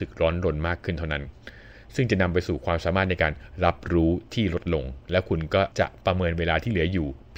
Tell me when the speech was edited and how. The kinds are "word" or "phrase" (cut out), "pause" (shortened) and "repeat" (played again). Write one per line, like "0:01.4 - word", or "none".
0:05.7 - pause